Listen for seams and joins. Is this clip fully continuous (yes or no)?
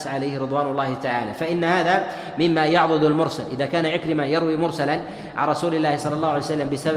yes